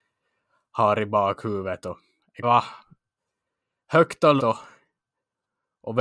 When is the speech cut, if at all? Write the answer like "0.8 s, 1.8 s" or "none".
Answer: 2.4 s, 4.4 s